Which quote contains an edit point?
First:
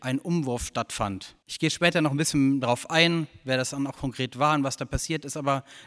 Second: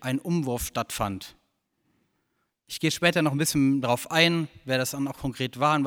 first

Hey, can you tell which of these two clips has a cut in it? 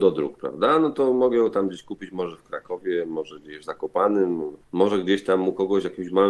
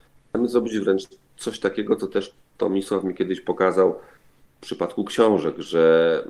first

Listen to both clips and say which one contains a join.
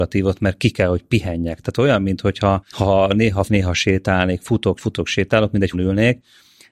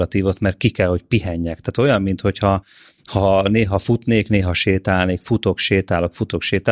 first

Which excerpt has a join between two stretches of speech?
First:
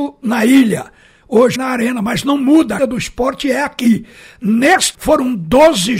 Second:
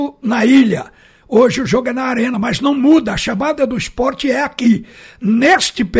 first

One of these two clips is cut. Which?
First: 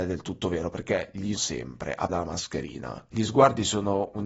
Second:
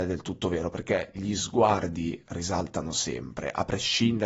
first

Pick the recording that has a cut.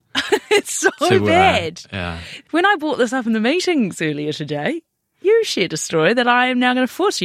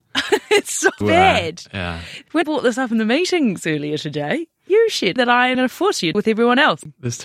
second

